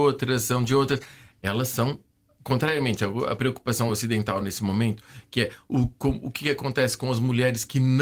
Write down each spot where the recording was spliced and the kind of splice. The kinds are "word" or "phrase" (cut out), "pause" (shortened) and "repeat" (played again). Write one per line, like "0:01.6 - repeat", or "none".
none